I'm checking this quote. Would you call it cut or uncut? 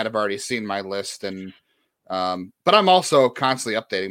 uncut